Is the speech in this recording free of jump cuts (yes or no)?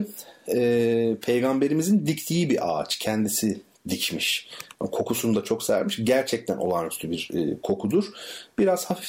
yes